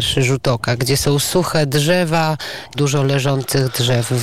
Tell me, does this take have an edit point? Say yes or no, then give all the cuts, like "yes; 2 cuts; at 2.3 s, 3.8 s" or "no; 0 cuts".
yes; 1 cut; at 2.7 s